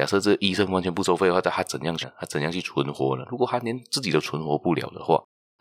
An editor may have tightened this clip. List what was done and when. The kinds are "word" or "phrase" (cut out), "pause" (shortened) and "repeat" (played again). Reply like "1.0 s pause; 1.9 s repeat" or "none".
2.0 s word